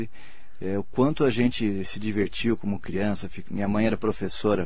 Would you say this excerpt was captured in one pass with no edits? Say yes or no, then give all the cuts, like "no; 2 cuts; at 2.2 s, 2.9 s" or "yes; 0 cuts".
yes; 0 cuts